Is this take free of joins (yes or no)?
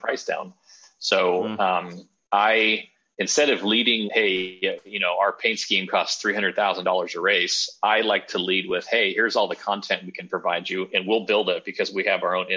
no